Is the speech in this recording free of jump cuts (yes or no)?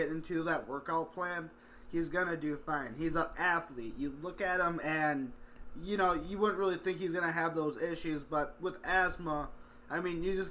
yes